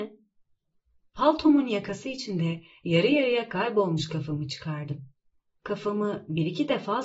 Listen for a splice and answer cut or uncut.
uncut